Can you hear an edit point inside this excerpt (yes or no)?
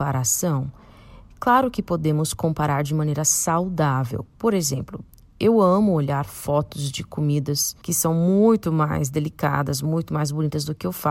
no